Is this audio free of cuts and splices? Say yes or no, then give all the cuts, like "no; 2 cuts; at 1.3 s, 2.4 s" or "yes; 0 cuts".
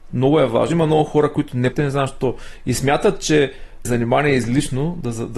no; 2 cuts; at 1.7 s, 3.8 s